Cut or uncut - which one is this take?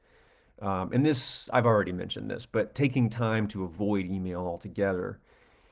uncut